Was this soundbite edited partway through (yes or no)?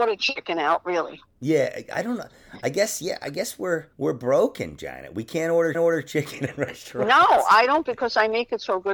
yes